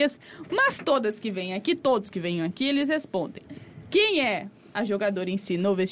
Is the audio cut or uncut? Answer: uncut